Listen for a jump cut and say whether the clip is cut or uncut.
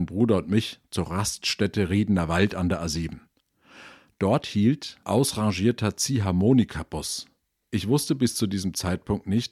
cut